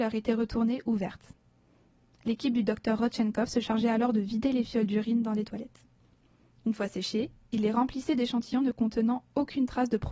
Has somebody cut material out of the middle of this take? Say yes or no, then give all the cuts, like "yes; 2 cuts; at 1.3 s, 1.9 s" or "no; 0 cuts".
no; 0 cuts